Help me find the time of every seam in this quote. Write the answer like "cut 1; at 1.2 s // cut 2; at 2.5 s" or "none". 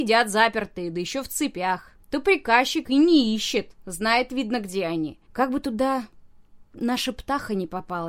cut 1; at 2.0 s // cut 2; at 2.8 s // cut 3; at 5.2 s

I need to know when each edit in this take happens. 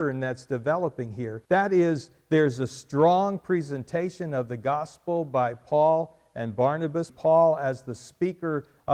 cut 1; at 1.4 s // cut 2; at 7.1 s

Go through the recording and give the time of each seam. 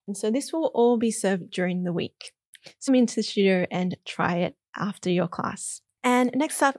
cut 1; at 2.9 s

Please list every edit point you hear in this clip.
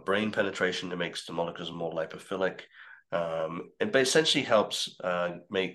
none

